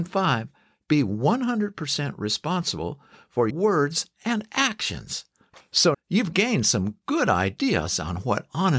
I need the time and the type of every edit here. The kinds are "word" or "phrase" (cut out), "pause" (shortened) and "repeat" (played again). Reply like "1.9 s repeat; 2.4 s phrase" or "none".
3.5 s word; 5.9 s word